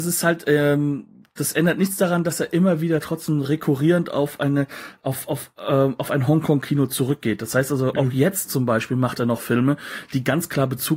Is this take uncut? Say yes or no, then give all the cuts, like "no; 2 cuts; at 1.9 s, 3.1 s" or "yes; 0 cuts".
yes; 0 cuts